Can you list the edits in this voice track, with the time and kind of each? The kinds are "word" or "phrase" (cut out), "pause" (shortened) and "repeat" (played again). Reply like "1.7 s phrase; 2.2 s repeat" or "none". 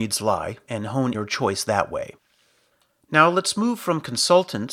1.1 s phrase

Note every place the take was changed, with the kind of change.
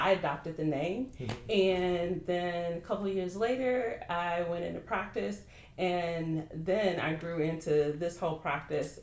none

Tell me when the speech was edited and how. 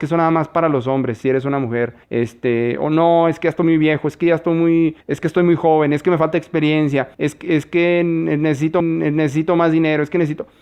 1.2 s phrase; 2.0 s pause; 5.0 s pause; 7.1 s pause; 8.8 s repeat

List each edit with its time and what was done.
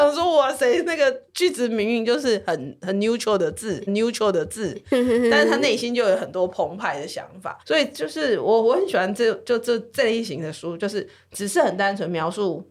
1.3 s pause; 3.9 s repeat; 7.6 s pause

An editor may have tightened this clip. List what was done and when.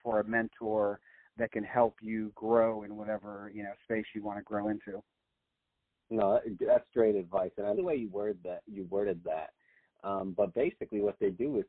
7.7 s word

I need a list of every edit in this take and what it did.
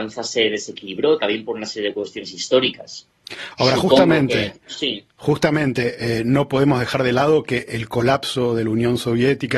none

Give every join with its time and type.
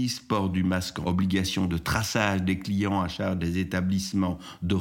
1.0 s phrase

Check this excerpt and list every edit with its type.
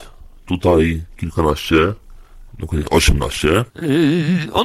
2.5 s pause; 3.7 s pause

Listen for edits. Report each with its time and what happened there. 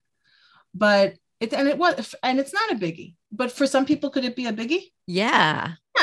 3.2 s pause

